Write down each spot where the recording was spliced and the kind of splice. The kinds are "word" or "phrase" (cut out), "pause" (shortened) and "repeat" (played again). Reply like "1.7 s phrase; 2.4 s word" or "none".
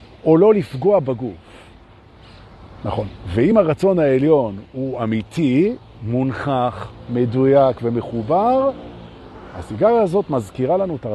none

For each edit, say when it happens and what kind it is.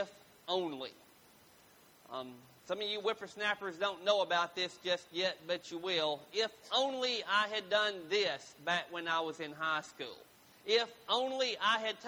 none

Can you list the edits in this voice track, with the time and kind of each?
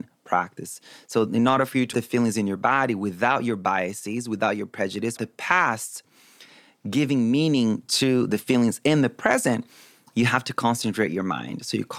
1.9 s word; 5.2 s word

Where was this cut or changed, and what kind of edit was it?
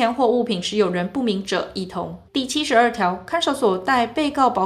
2.3 s pause

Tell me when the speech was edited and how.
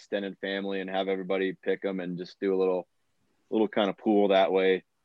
none

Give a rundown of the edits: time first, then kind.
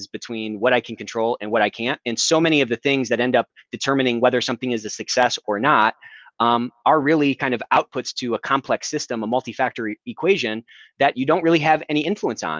none

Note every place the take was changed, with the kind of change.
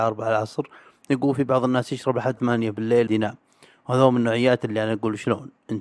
2.4 s word; 3.1 s word

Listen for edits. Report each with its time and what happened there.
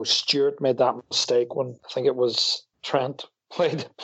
1.8 s pause; 2.7 s pause

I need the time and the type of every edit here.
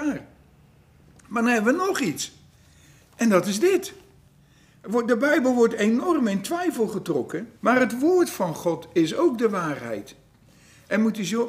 7.6 s pause

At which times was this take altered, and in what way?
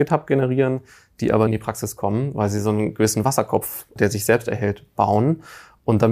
1.5 s word; 4.0 s word

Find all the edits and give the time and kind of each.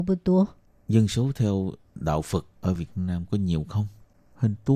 none

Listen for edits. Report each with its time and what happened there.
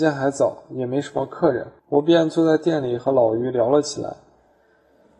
1.8 s pause

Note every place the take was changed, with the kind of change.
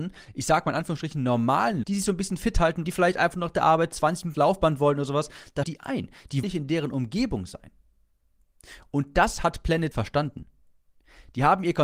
1.8 s word; 2.8 s word; 4.3 s word; 5.6 s word; 6.4 s word; 9.9 s word

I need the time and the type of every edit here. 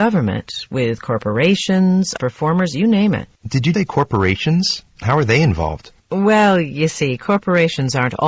2.2 s word; 3.4 s pause; 3.7 s word; 4.9 s pause; 6.0 s pause

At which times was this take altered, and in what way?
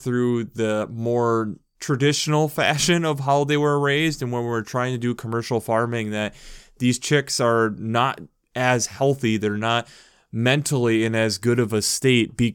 none

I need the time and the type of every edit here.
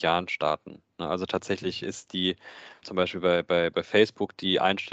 2.8 s word

